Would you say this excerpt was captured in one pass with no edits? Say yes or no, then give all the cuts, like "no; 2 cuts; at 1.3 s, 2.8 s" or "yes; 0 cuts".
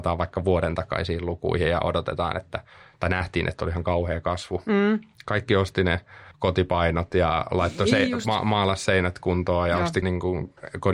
no; 1 cut; at 10.0 s